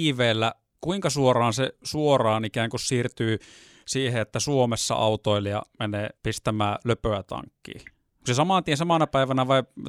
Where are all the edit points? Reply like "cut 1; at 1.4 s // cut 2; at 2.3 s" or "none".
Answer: cut 1; at 6.1 s